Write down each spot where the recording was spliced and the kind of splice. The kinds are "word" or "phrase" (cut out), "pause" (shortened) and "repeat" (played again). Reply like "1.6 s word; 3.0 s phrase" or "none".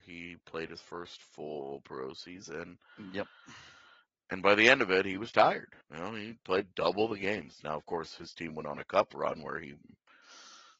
5.8 s pause